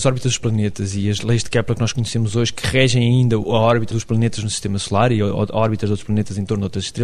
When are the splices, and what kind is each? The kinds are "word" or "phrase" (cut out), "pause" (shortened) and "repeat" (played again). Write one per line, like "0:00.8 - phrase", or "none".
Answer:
none